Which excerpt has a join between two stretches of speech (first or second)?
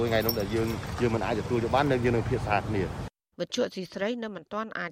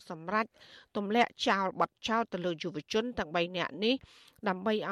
first